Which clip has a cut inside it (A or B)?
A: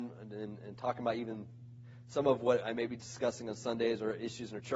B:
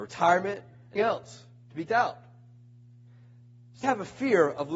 B